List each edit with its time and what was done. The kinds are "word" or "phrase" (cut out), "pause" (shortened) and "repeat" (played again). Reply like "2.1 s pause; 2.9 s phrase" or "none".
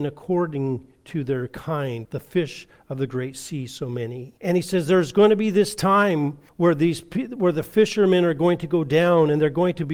2.0 s word; 4.4 s pause; 6.5 s pause